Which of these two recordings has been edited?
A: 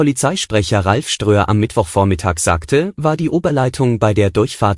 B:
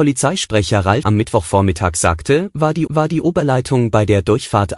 B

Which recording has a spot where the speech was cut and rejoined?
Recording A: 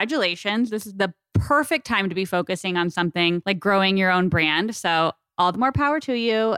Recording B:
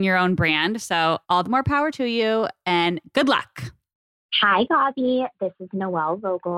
B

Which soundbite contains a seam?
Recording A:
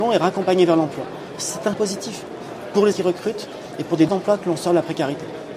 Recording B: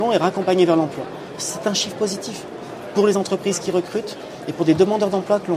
A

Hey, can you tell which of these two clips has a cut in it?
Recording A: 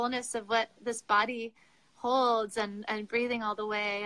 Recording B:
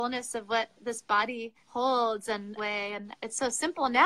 B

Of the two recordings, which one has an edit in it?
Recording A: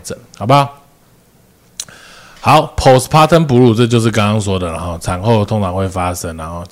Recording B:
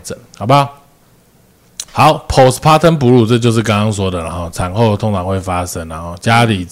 B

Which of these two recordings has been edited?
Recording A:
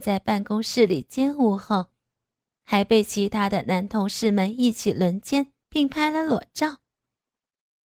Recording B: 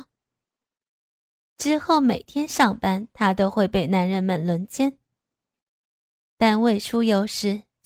A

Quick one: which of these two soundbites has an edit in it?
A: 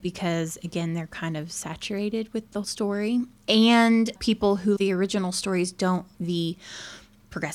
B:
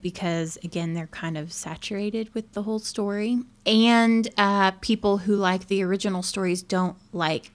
A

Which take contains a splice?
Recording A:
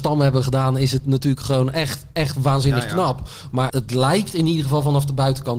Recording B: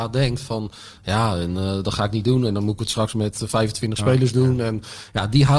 A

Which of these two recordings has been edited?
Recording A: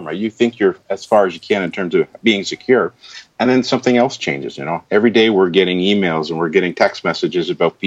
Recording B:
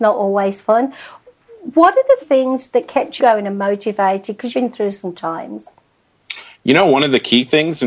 B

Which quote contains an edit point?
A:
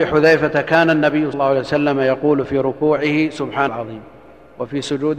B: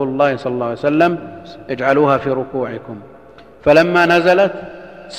A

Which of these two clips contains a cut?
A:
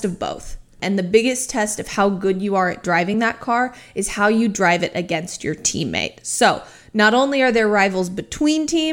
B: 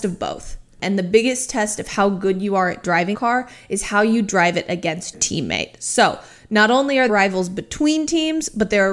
B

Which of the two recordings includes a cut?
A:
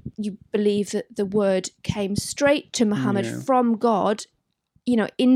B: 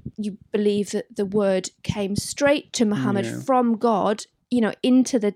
B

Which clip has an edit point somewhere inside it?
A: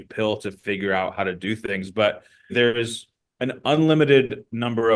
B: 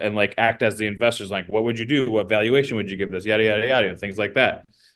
A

